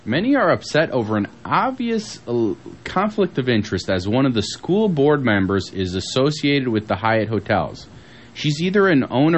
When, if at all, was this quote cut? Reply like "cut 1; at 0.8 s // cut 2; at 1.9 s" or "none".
none